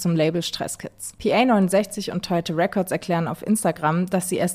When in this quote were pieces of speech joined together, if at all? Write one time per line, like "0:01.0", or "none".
none